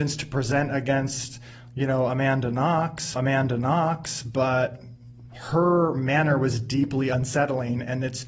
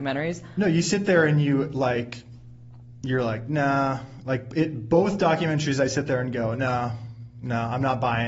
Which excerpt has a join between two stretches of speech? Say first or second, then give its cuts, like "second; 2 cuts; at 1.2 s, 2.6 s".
first; 1 cut; at 3.2 s